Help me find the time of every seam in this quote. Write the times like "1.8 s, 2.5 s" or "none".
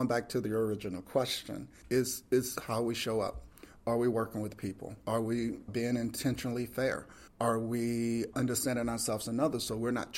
1.8 s, 5.0 s, 5.7 s, 7.3 s, 8.3 s